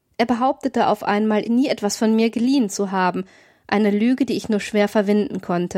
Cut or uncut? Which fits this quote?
cut